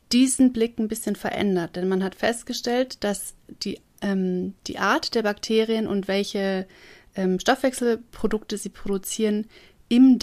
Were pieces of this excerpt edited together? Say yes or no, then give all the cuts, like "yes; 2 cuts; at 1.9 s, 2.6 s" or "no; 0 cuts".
no; 0 cuts